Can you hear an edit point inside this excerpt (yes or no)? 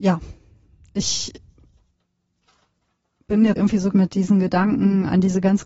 yes